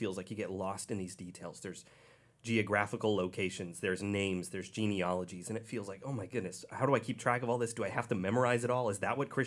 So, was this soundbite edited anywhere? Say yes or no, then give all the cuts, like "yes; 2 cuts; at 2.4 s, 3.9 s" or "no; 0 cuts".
no; 0 cuts